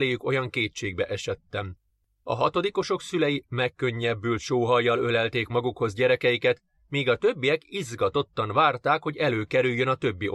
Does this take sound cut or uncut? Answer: uncut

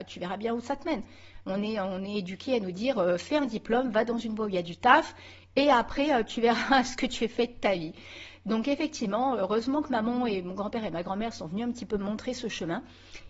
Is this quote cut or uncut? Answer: uncut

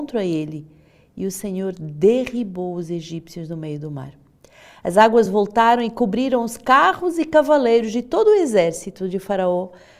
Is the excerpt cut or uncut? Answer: uncut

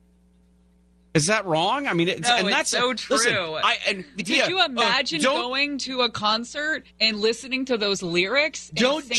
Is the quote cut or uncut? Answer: cut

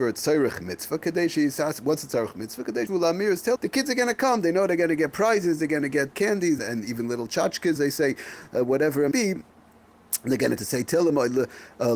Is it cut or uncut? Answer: cut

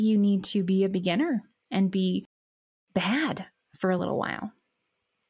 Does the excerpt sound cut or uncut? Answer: uncut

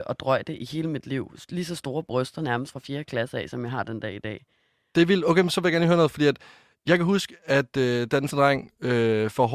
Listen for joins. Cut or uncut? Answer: cut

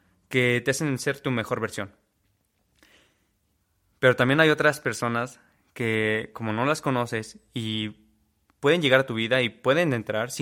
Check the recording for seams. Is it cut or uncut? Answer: uncut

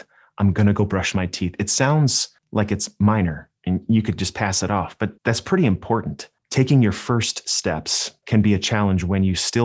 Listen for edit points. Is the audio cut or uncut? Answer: cut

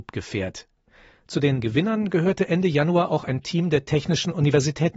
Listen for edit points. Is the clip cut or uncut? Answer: cut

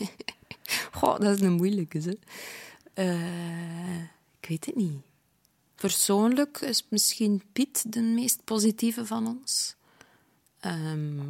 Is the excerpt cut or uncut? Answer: uncut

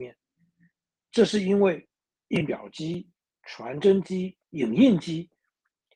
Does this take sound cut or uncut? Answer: cut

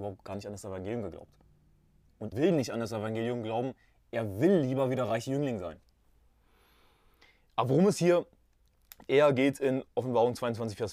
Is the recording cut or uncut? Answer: cut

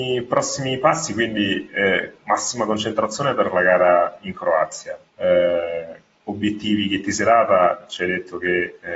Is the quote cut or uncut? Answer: cut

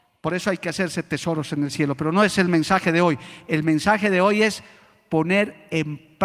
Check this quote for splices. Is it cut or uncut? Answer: uncut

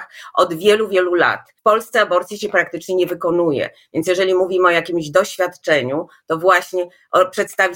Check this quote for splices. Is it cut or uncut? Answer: cut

